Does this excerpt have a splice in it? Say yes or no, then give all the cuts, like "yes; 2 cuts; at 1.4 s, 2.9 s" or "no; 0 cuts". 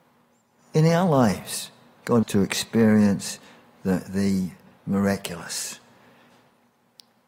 yes; 1 cut; at 2.2 s